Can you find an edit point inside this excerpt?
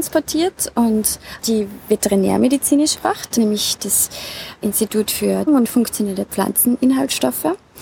yes; 5 cuts; at 1.4 s, 2.9 s, 3.4 s, 4.6 s, 5.5 s

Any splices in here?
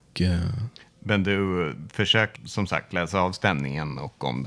yes; 1 cut; at 2.4 s

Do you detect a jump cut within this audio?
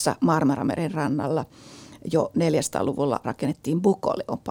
yes; 1 cut; at 3.2 s

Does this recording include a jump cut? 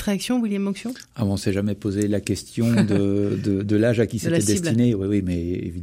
no; 0 cuts

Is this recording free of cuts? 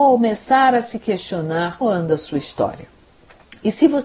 no; 1 cut; at 1.8 s

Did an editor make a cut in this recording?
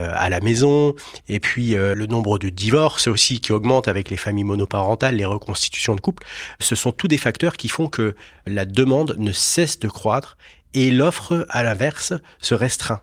no; 0 cuts

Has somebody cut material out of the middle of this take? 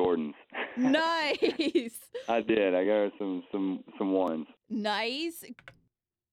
no; 0 cuts

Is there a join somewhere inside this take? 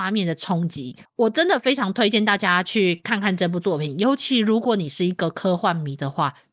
yes; 1 cut; at 1.0 s

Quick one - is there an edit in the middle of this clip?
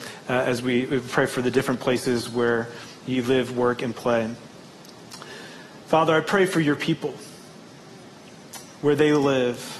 yes; 1 cut; at 3.0 s

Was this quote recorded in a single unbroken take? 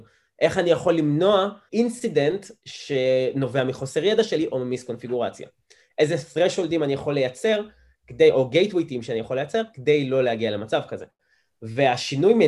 no; 1 cut; at 1.7 s

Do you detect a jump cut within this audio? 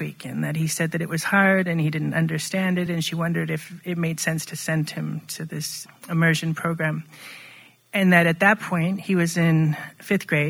no; 0 cuts

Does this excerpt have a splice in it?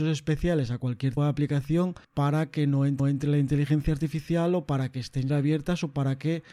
yes; 4 cuts; at 1.2 s, 2.0 s, 3.0 s, 5.3 s

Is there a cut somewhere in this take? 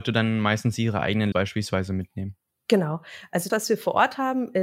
yes; 2 cuts; at 1.3 s, 3.5 s

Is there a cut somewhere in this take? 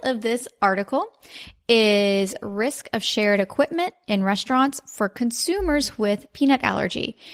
no; 0 cuts

